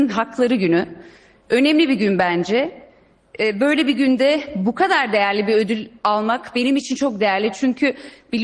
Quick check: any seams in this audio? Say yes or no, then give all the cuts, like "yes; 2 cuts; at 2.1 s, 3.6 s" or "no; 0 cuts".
no; 0 cuts